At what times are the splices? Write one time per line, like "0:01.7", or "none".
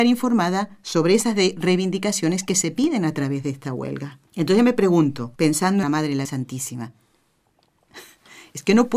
0:04.3
0:05.4
0:05.8
0:06.2